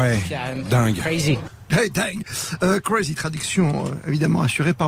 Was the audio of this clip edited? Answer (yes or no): no